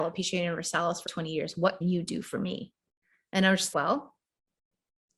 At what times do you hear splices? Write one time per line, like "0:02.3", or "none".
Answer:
0:01.1
0:01.8
0:03.7